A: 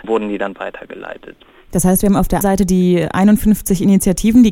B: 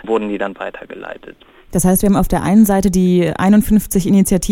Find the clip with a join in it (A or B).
A